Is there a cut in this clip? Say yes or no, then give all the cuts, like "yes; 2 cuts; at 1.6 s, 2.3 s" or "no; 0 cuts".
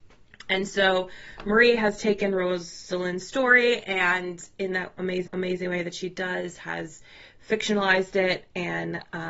yes; 1 cut; at 5.3 s